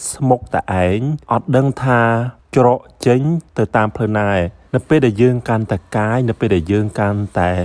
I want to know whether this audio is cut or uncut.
cut